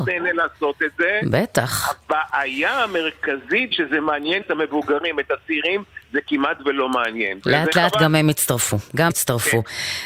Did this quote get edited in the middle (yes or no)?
yes